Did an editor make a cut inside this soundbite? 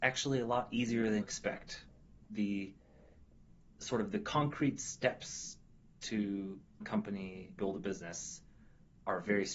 yes; 4 cuts; at 1.2 s, 2.2 s, 6.8 s, 7.6 s

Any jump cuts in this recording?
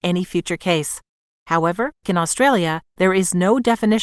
yes; 2 cuts; at 2.0 s, 2.9 s

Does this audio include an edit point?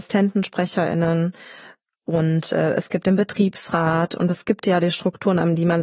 no; 0 cuts

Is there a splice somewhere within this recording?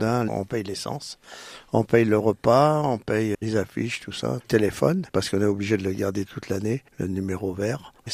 yes; 4 cuts; at 3.3 s, 4.4 s, 5.1 s, 6.9 s

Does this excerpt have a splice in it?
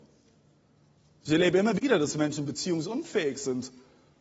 no; 0 cuts

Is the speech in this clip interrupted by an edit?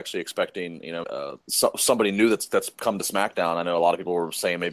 yes; 2 cuts; at 1.0 s, 1.4 s

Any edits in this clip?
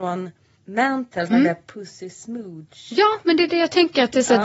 yes; 1 cut; at 1.3 s

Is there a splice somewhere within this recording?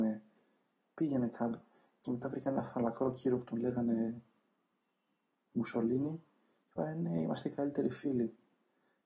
no; 0 cuts

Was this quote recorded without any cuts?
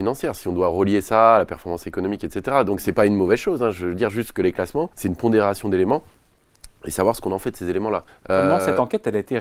no; 2 cuts; at 4.9 s, 8.1 s

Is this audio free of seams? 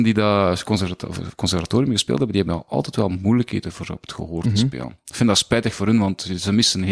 yes; 0 cuts

